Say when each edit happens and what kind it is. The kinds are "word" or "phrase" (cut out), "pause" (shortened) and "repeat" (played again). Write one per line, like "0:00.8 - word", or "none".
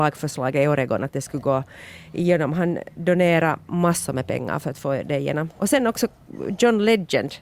none

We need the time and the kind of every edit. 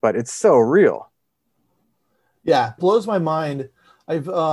0:02.8 - phrase

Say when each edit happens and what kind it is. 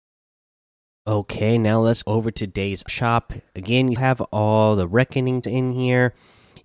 0:02.0 - word
0:02.9 - word
0:04.0 - word
0:05.4 - word

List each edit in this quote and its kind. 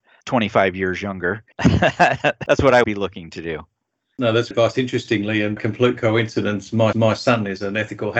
0:01.5 - pause
0:02.8 - word
0:04.5 - word
0:05.6 - word
0:06.9 - repeat

